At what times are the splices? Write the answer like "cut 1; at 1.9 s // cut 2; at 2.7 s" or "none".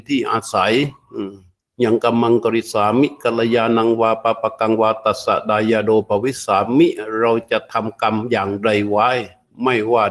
cut 1; at 1.6 s